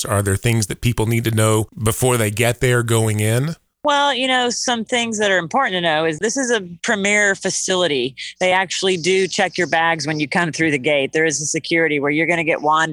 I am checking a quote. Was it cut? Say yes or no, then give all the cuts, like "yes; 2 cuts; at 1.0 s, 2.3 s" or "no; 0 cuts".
no; 0 cuts